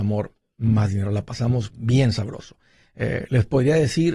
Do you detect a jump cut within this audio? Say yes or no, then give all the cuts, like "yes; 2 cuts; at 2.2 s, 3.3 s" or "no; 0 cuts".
no; 0 cuts